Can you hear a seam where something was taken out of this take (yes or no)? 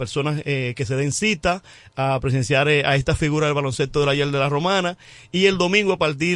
no